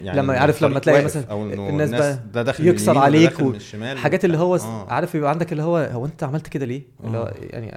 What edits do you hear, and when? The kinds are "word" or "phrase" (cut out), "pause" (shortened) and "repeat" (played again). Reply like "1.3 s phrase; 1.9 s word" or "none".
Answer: none